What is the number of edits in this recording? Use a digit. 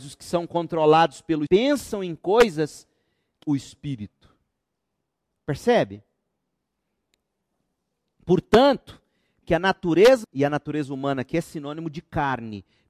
4